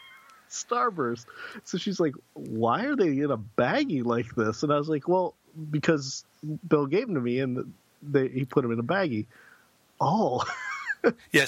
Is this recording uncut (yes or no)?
yes